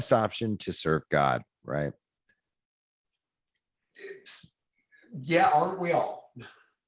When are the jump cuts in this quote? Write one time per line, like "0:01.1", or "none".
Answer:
none